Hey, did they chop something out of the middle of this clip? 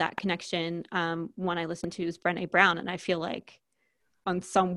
no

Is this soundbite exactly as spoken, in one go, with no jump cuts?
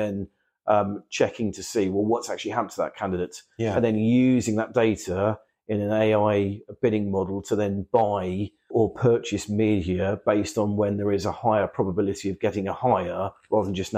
no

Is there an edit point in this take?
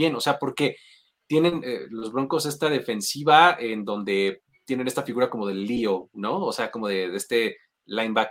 no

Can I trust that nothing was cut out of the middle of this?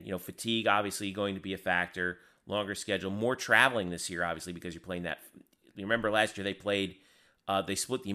yes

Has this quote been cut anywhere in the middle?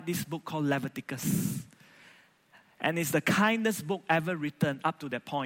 no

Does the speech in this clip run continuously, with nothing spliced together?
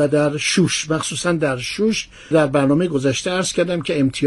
no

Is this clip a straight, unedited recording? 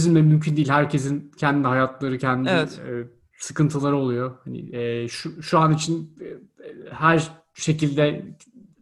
yes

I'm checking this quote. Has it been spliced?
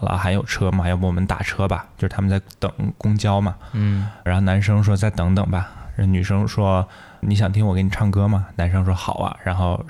yes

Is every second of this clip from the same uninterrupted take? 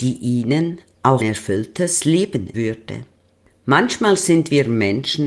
no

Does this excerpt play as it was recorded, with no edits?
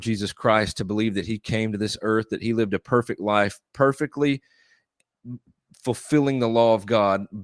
yes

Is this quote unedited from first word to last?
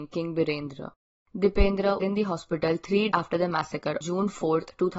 no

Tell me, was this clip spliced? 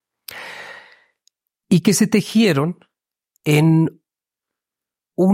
no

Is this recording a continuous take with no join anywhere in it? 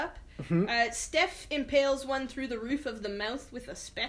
yes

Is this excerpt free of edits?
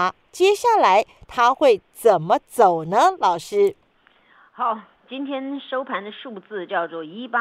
yes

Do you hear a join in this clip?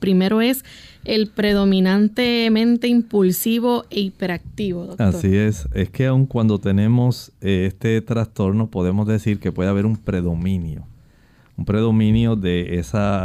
no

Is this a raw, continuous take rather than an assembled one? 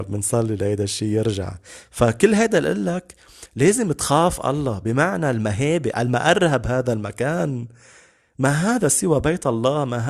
yes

